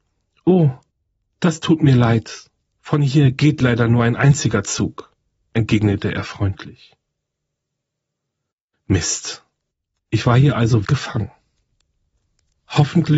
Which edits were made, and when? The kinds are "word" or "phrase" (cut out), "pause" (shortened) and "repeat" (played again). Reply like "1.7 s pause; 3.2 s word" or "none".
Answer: 10.8 s word

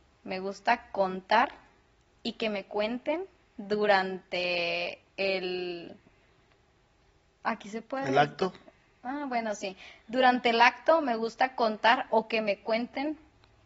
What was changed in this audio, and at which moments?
none

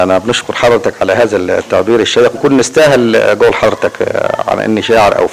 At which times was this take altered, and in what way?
2.3 s word

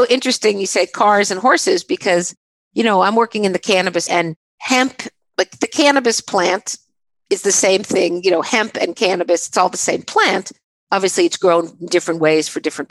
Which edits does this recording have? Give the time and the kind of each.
4.1 s word

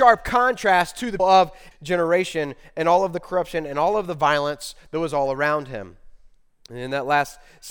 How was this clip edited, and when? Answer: 1.2 s word; 1.7 s word

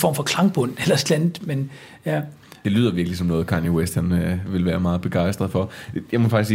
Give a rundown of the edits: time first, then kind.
none

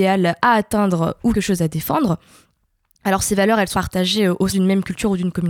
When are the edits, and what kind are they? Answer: 1.3 s word; 3.7 s word; 4.5 s word

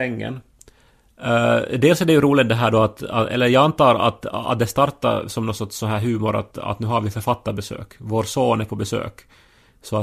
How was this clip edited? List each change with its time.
6.5 s word

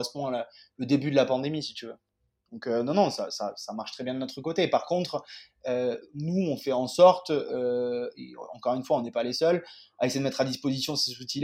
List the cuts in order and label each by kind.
none

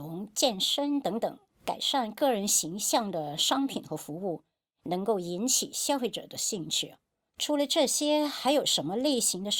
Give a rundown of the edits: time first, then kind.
1.5 s pause

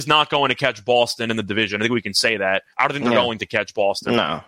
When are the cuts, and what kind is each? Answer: 2.7 s pause

